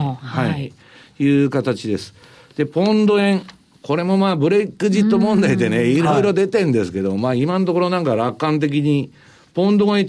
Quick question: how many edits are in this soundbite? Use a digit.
0